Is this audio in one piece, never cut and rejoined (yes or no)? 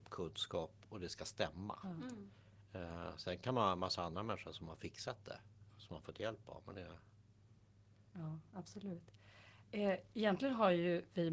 yes